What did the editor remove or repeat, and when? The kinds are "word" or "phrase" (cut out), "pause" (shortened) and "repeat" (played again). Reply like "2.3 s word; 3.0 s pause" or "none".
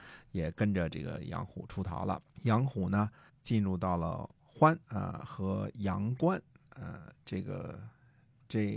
2.3 s pause; 3.3 s word; 4.8 s pause